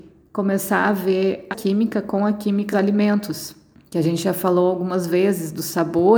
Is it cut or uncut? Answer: cut